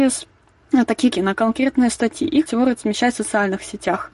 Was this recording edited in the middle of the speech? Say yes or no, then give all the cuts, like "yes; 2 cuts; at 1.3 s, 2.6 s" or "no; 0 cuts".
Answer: yes; 2 cuts; at 1.1 s, 2.5 s